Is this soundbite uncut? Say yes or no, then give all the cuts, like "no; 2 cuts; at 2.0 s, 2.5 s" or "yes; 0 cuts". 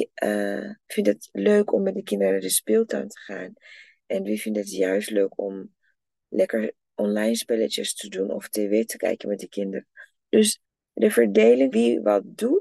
no; 2 cuts; at 10.6 s, 11.7 s